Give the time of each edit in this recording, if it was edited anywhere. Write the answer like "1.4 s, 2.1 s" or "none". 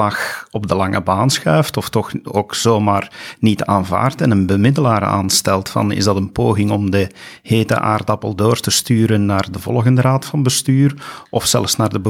none